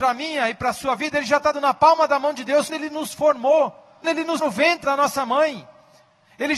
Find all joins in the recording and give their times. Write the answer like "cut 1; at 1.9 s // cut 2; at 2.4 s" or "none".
cut 1; at 1.5 s // cut 2; at 2.7 s // cut 3; at 4.0 s // cut 4; at 4.4 s // cut 5; at 4.8 s

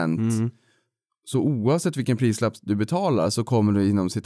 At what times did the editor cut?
none

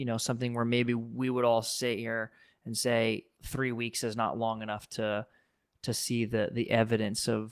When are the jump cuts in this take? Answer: none

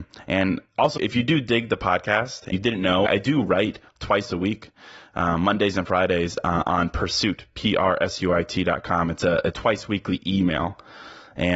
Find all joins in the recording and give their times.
cut 1; at 1.0 s // cut 2; at 2.5 s // cut 3; at 3.1 s // cut 4; at 9.5 s

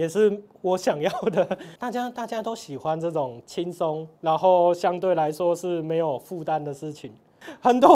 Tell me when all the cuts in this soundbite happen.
cut 1; at 1.8 s // cut 2; at 4.2 s

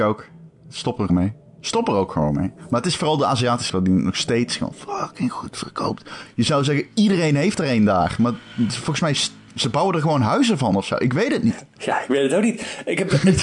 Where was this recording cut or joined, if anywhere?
cut 1; at 1.1 s // cut 2; at 3.7 s

